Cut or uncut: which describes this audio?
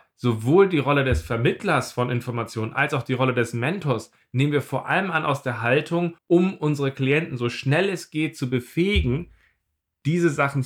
cut